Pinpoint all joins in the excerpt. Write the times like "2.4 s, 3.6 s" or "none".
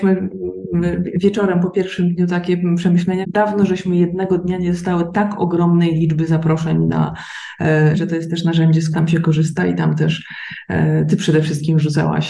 3.2 s, 7.9 s, 8.9 s